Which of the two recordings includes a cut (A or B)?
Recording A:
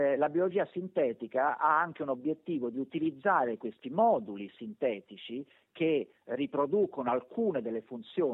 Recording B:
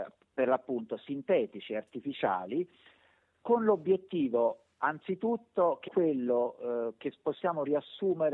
B